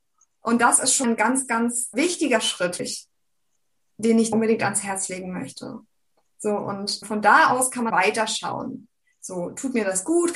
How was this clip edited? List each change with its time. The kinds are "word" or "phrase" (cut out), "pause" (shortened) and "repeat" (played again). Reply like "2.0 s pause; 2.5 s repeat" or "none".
1.0 s word; 1.9 s word; 2.8 s word; 4.3 s word; 7.0 s word; 7.9 s word